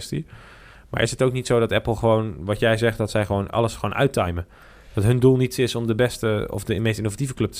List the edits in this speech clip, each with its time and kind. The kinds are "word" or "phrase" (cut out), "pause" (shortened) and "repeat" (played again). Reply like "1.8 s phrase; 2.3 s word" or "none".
none